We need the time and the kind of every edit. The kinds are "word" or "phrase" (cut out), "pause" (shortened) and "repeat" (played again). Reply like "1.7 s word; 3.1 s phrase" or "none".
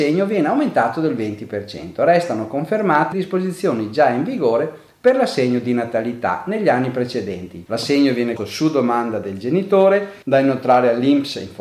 3.1 s word; 7.7 s word; 8.4 s word; 10.2 s pause